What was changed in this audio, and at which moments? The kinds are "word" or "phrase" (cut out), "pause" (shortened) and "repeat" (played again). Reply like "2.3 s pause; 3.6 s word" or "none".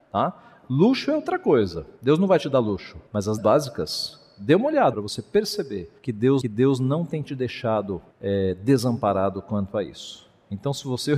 2.0 s pause; 3.1 s pause; 3.4 s word; 4.9 s phrase; 6.0 s pause; 6.4 s repeat; 8.1 s pause